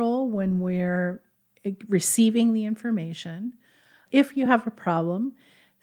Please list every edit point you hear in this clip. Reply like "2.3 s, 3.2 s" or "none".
none